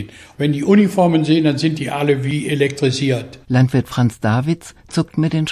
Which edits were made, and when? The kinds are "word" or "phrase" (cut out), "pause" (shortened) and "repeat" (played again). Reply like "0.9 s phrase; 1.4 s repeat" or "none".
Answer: none

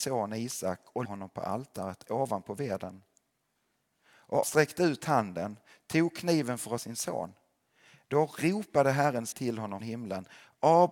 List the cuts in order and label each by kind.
1.0 s word; 4.4 s word; 6.8 s word; 9.3 s word; 9.8 s word

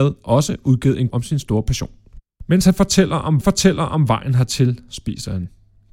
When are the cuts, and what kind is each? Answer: 1.1 s word; 2.3 s pause; 3.4 s repeat

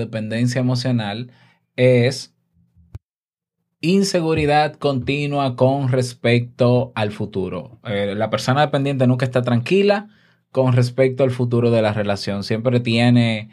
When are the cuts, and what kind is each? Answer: none

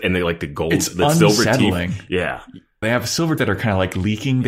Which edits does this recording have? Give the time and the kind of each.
2.8 s word; 3.4 s word

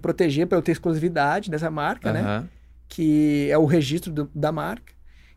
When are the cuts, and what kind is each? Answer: none

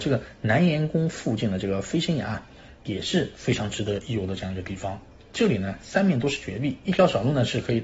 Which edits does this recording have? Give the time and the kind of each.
none

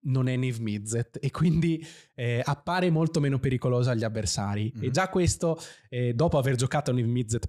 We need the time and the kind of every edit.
none

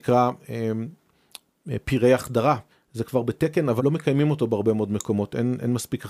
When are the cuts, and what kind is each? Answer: 2.7 s pause; 3.8 s word

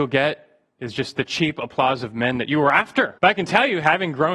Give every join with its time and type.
3.2 s pause

